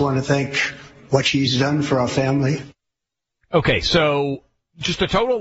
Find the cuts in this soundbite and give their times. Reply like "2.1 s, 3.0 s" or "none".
none